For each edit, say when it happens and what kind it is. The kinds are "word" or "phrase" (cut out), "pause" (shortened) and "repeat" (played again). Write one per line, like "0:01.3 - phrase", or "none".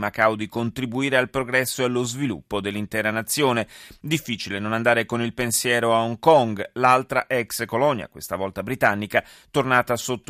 none